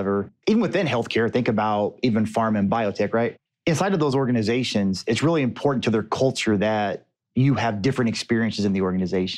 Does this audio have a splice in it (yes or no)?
no